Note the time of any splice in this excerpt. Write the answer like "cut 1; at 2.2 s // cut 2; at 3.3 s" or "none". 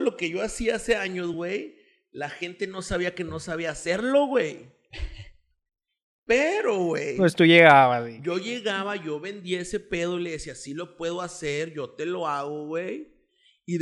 none